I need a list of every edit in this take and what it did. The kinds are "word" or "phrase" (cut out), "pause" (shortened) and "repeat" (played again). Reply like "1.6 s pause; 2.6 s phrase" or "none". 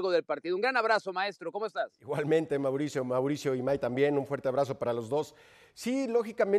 none